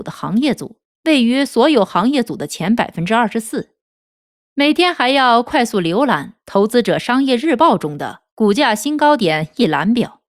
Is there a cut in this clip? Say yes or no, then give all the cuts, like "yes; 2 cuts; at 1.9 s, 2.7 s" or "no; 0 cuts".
no; 0 cuts